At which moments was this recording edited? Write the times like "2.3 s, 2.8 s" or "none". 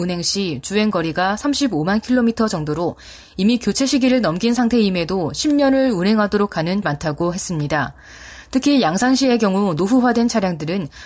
6.8 s